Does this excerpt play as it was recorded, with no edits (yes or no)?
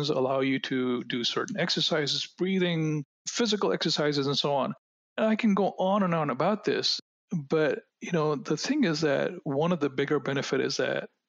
yes